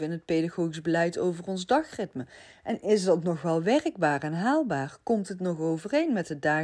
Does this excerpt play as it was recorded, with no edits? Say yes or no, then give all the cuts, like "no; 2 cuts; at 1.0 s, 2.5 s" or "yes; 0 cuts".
yes; 0 cuts